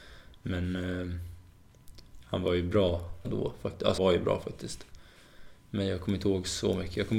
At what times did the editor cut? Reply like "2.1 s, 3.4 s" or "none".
3.2 s, 4.0 s